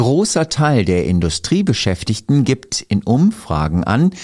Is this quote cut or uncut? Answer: uncut